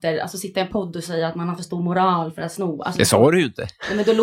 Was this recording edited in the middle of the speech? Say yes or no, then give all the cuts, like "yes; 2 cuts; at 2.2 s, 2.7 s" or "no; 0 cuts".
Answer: no; 0 cuts